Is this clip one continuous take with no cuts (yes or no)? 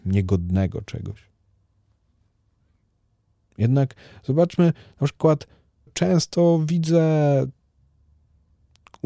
no